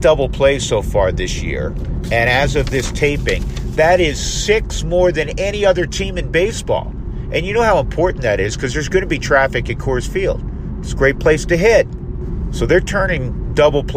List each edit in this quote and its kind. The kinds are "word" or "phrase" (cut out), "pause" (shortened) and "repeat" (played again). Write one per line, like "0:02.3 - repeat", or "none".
none